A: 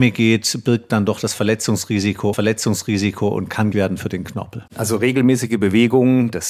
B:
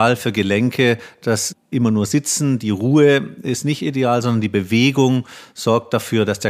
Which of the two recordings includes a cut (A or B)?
A